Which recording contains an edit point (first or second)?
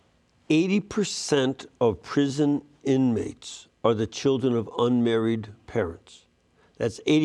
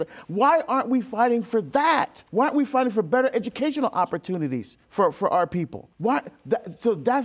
second